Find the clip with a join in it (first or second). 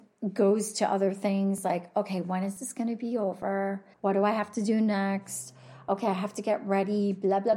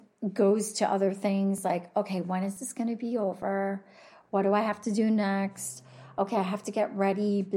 first